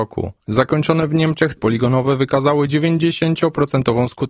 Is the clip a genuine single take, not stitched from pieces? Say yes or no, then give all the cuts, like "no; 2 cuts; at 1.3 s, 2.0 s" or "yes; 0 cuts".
no; 1 cut; at 1.6 s